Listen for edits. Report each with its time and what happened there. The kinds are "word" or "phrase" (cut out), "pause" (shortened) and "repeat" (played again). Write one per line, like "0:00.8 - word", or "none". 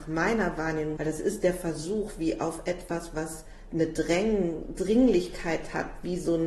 0:01.0 - phrase